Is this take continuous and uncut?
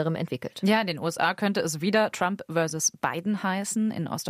yes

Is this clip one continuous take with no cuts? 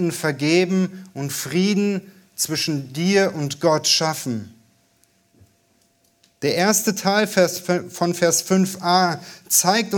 yes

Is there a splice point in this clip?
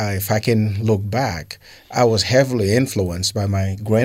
no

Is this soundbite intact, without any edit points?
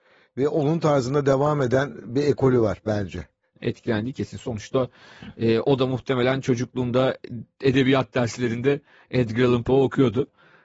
yes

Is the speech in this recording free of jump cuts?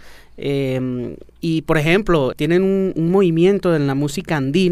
no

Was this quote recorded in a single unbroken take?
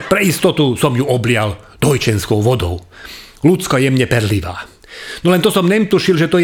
yes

